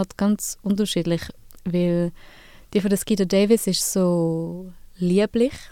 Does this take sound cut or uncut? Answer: uncut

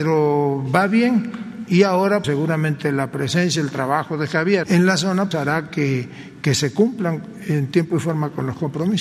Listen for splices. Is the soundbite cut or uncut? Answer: cut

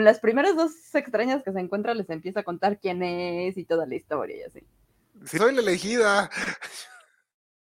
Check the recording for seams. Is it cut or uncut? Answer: cut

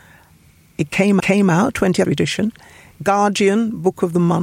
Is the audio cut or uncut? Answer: cut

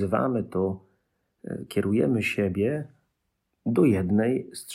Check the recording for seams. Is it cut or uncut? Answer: uncut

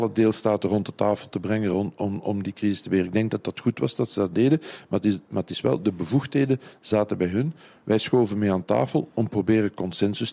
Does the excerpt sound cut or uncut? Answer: uncut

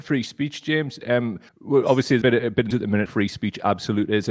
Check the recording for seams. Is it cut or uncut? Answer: cut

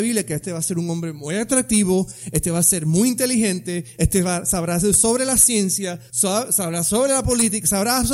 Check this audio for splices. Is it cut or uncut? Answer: uncut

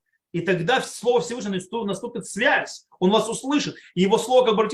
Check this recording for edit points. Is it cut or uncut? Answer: uncut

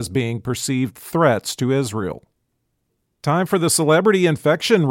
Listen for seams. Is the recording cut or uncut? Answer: uncut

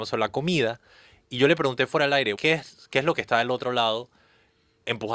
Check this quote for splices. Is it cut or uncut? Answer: cut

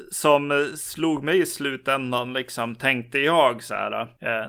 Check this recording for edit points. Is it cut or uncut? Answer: uncut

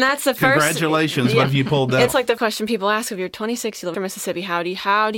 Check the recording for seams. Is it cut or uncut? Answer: cut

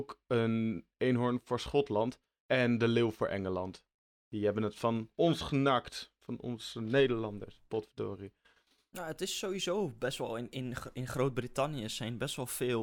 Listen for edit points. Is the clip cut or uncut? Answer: uncut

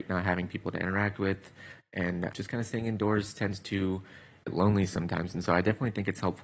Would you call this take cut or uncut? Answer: cut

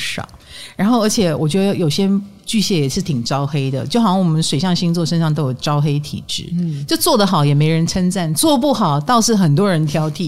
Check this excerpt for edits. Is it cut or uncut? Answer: uncut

